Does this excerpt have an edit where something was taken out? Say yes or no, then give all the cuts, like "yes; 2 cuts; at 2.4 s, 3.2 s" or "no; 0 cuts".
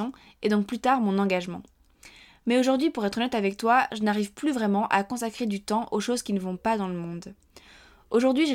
no; 0 cuts